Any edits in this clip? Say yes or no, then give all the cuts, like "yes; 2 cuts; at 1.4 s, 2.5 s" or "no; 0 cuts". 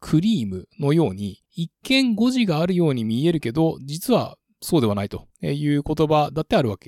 yes; 1 cut; at 1.4 s